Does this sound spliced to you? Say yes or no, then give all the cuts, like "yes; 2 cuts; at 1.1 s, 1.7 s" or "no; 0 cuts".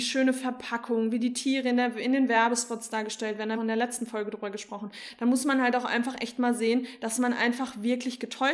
yes; 1 cut; at 3.5 s